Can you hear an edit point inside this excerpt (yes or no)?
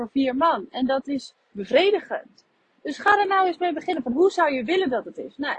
yes